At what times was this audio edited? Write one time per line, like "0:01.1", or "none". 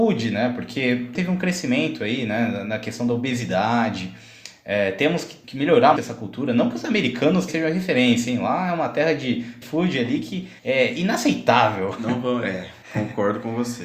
0:01.1
0:05.4
0:06.0
0:07.5
0:09.6
0:10.6
0:12.8